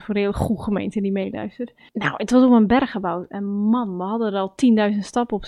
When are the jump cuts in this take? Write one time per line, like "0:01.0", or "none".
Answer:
none